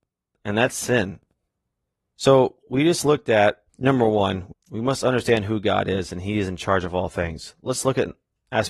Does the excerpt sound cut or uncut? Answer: cut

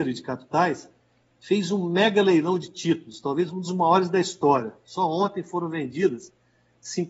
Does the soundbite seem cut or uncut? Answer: uncut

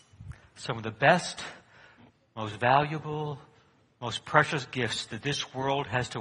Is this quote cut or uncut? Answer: uncut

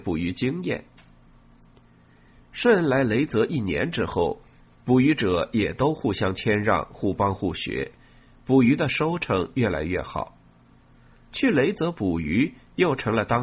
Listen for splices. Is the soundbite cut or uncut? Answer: uncut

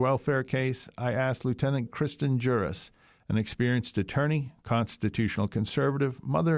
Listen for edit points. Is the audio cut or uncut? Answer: cut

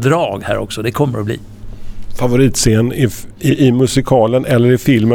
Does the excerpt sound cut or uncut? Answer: uncut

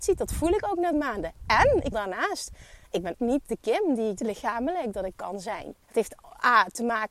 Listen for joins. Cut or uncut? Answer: cut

